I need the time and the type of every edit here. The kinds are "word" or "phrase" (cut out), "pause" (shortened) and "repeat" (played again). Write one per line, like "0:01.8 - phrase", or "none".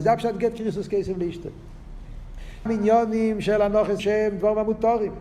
0:02.7 - word
0:04.0 - word